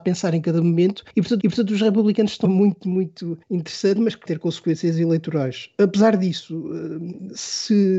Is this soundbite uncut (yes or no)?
no